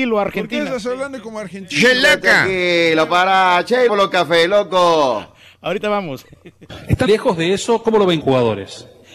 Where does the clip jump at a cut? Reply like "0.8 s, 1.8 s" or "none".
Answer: 3.9 s, 7.1 s, 8.2 s